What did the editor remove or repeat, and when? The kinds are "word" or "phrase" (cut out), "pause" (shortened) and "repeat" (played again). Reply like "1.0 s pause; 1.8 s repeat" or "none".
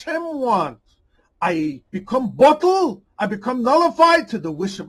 1.9 s pause